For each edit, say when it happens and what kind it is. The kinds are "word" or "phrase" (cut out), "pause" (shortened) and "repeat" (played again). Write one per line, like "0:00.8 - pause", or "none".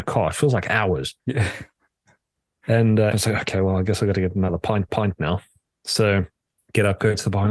0:03.1 - word
0:04.9 - repeat
0:06.5 - pause